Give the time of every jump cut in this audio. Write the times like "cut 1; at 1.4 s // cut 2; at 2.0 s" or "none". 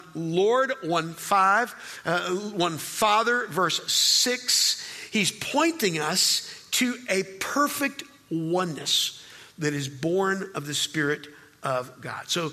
none